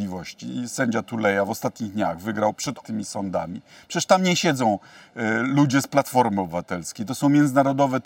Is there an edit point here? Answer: yes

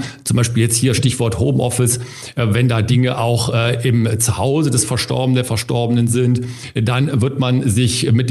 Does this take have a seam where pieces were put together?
no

